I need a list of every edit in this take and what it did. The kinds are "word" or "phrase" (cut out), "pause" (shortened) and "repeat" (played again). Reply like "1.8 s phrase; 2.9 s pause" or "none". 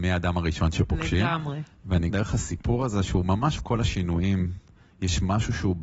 2.1 s phrase; 3.6 s phrase